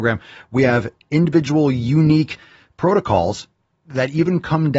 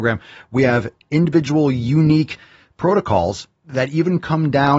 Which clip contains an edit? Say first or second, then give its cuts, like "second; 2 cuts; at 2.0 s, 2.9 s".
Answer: second; 1 cut; at 3.6 s